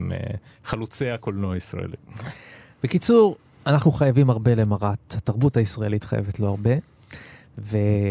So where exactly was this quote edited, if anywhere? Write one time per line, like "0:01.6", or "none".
none